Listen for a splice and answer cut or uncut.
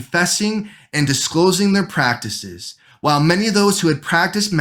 uncut